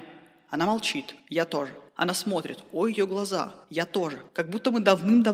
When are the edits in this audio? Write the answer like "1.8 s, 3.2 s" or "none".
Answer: 1.2 s, 1.9 s, 3.6 s, 4.3 s

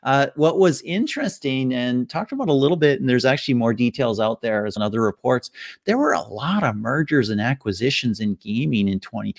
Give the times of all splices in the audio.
4.8 s

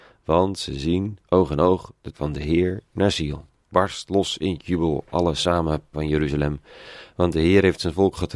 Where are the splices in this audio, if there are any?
1.2 s, 2.1 s, 3.5 s, 5.9 s

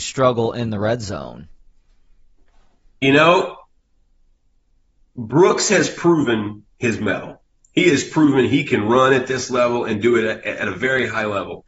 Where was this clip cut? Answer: none

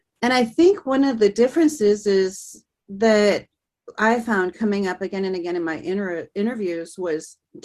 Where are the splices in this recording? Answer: none

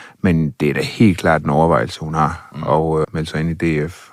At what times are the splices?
3.0 s

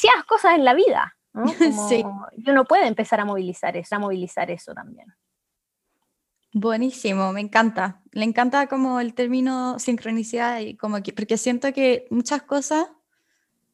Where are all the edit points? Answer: 3.9 s

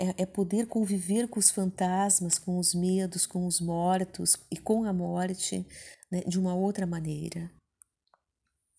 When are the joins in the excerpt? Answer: none

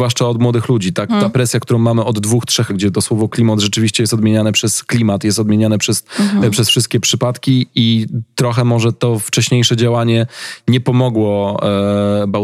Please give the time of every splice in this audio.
1.1 s, 2.7 s

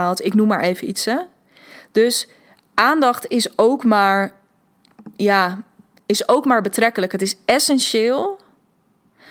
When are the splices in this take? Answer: none

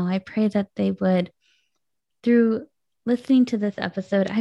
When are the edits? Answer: none

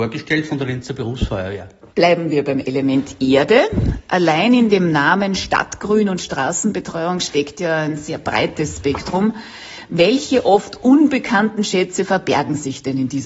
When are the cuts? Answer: 1.9 s

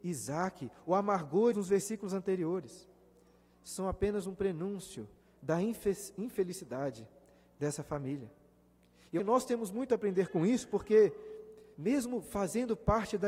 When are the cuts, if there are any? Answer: 1.5 s, 9.2 s, 11.7 s

